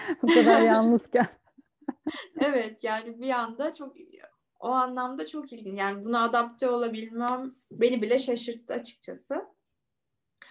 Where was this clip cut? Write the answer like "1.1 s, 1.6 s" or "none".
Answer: 4.3 s, 7.6 s